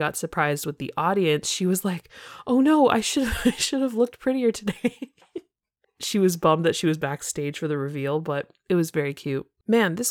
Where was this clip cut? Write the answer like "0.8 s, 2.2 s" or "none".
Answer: none